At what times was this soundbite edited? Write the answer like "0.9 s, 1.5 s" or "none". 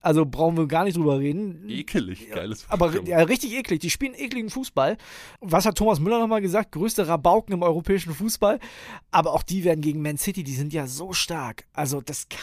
5.4 s